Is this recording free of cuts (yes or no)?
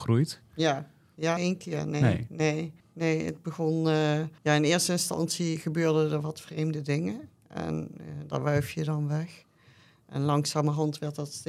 no